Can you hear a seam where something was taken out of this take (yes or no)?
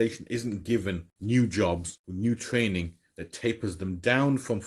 no